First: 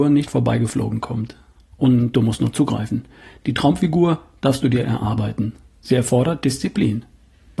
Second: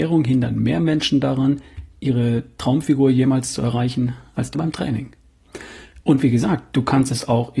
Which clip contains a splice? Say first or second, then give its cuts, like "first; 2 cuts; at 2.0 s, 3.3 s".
second; 1 cut; at 4.5 s